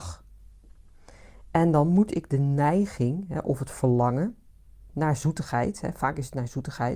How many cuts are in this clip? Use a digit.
0